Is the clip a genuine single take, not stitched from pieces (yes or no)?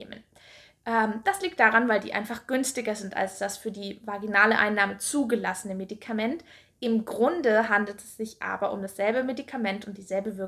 yes